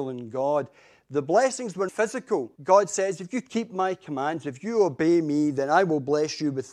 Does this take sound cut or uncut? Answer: cut